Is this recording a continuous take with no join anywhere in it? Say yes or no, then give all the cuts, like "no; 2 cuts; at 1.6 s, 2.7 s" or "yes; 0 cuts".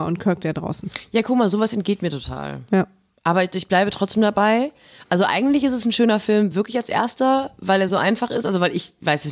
yes; 0 cuts